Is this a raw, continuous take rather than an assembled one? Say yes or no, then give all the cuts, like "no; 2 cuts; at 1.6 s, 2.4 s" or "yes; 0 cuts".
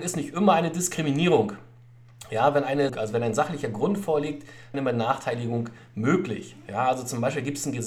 no; 2 cuts; at 2.9 s, 4.7 s